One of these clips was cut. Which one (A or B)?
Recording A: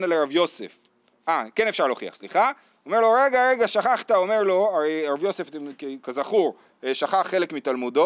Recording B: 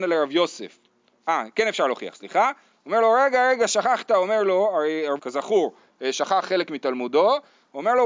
B